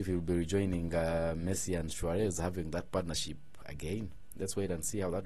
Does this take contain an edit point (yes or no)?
no